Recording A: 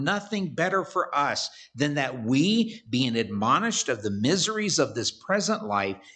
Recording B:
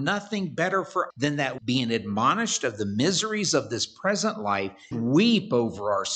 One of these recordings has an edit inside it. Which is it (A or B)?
B